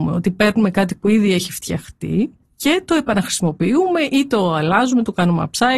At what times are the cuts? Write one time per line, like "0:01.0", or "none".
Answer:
none